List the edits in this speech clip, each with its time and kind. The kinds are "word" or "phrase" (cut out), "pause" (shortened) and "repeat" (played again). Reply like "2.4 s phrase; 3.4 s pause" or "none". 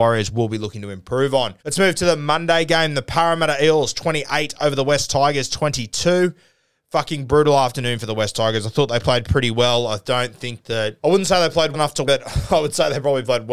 1.6 s pause; 11.0 s pause; 11.7 s word; 12.1 s word